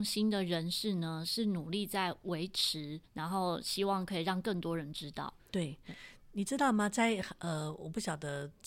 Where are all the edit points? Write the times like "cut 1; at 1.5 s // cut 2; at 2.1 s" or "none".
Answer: cut 1; at 3.1 s // cut 2; at 5.4 s